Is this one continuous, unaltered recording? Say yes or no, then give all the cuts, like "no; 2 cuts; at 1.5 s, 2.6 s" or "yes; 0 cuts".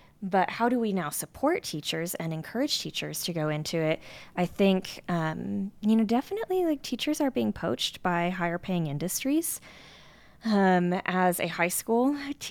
yes; 0 cuts